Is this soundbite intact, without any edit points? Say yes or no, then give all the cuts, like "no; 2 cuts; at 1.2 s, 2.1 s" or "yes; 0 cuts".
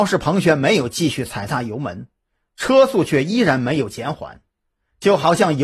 yes; 0 cuts